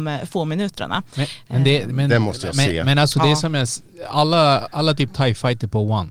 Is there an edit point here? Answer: no; 0 cuts

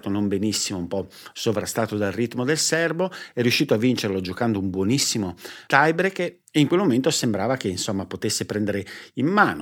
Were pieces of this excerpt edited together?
no; 0 cuts

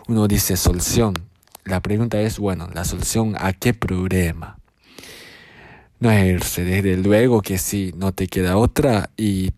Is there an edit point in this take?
no; 0 cuts

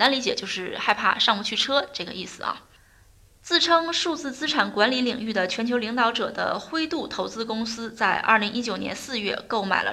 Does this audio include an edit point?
no; 0 cuts

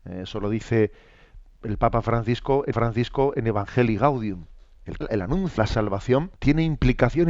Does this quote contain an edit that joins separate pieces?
yes; 4 cuts; at 2.7 s, 5.0 s, 5.6 s, 6.4 s

